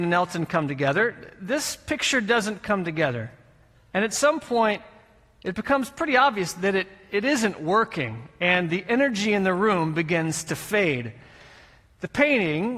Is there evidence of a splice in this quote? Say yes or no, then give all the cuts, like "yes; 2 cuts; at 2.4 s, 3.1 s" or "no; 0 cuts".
no; 0 cuts